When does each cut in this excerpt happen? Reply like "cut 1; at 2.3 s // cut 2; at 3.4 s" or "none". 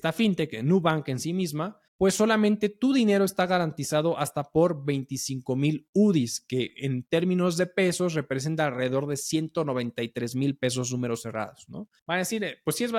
cut 1; at 1.9 s // cut 2; at 12.0 s